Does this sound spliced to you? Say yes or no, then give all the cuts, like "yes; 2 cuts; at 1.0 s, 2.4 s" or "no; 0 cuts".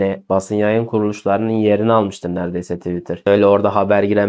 no; 0 cuts